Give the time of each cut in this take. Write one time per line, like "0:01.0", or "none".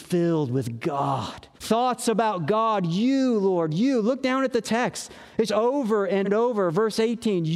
0:01.5
0:05.5
0:06.2